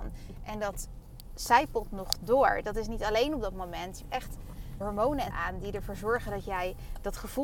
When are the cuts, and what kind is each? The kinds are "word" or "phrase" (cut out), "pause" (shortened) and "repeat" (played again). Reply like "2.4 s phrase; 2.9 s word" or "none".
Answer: 4.0 s word; 4.8 s word; 5.3 s word

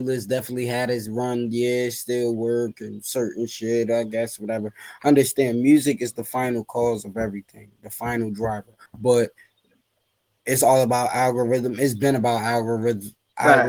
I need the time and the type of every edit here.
8.9 s pause

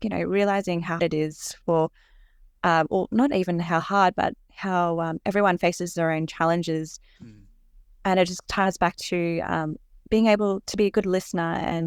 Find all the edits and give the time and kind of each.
1.0 s word

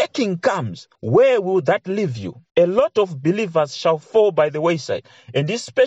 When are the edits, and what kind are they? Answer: 0.9 s pause; 2.5 s pause

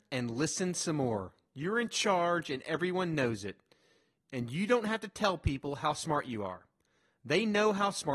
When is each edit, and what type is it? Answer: none

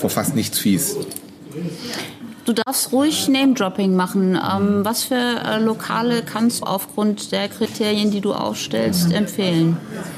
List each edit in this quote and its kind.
6.6 s word

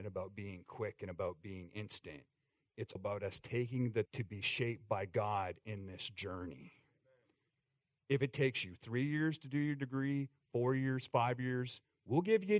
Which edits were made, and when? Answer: 3.0 s word; 4.1 s word

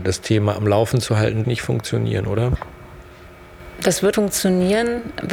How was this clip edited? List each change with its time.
1.4 s phrase; 4.1 s word

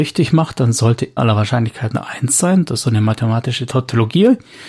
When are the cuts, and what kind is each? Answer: 1.2 s phrase; 2.8 s word

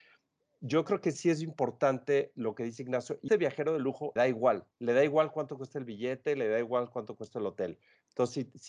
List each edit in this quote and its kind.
3.3 s word; 4.2 s word; 4.7 s pause

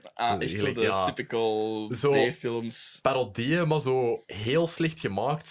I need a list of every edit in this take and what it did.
4.2 s pause

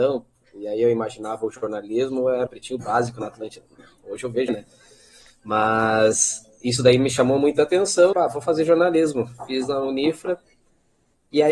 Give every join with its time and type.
2.5 s phrase; 4.5 s phrase; 8.1 s phrase

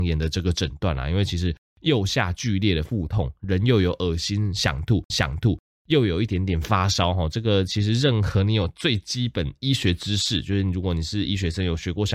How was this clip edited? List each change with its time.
5.1 s repeat

